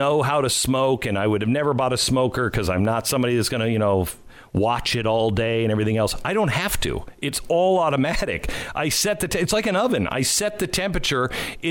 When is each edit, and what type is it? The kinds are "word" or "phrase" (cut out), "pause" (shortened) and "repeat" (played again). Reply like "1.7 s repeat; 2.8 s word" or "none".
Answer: none